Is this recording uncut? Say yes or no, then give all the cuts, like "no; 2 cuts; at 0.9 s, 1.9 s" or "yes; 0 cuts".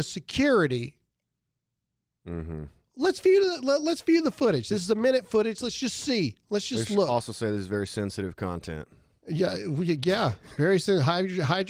yes; 0 cuts